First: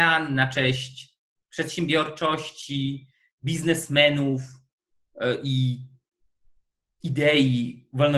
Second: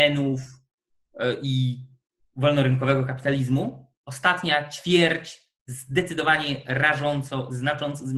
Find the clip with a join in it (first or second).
second